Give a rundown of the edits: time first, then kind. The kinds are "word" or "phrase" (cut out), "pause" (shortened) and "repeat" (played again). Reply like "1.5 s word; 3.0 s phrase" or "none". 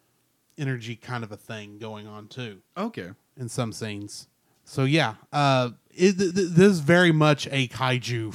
6.3 s repeat